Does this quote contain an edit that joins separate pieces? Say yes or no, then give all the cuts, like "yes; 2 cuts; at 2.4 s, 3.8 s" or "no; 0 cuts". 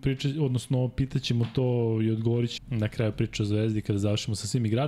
yes; 1 cut; at 2.6 s